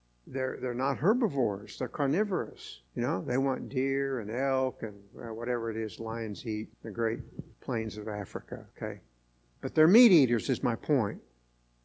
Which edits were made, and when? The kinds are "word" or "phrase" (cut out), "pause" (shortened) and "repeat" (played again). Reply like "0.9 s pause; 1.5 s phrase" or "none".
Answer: 2.9 s pause; 6.7 s pause; 7.5 s pause; 8.7 s pause